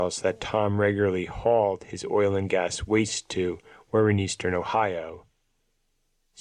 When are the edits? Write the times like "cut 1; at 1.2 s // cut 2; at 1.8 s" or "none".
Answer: none